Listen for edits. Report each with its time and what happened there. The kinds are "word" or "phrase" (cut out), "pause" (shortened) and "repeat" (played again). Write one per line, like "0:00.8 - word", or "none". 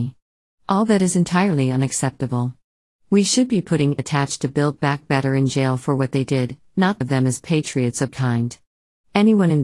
0:04.0 - word
0:07.0 - word
0:08.1 - word